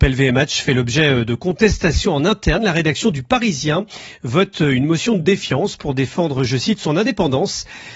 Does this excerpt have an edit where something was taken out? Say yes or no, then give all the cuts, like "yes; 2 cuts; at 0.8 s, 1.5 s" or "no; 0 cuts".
no; 0 cuts